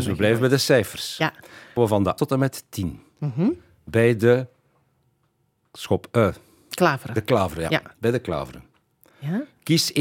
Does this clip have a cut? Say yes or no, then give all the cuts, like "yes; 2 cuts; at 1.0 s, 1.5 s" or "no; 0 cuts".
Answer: yes; 2 cuts; at 1.8 s, 2.2 s